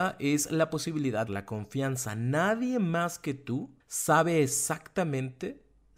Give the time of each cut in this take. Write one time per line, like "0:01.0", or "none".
0:01.3
0:03.8